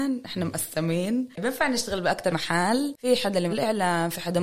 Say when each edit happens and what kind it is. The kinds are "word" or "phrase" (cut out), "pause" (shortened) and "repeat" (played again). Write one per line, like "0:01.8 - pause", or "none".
0:02.3 - word
0:03.5 - phrase